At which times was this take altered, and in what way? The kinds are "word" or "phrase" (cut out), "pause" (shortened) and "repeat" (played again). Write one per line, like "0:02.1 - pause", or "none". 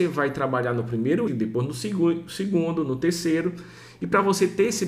0:01.3 - word